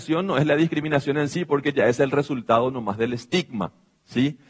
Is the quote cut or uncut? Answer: uncut